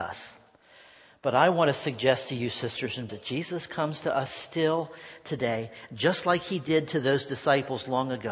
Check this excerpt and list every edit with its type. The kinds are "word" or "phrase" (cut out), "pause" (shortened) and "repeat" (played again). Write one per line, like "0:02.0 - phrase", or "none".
0:03.1 - word